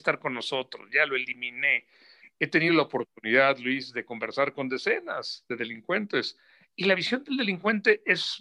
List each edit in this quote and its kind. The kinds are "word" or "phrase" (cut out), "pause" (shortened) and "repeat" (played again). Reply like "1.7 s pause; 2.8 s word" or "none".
none